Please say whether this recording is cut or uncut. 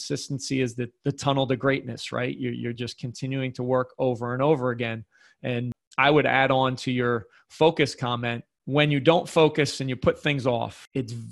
uncut